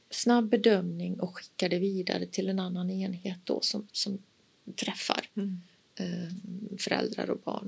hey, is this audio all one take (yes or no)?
no